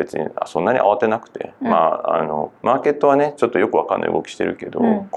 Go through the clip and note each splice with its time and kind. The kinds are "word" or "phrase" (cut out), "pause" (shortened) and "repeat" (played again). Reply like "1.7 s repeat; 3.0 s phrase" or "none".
2.6 s pause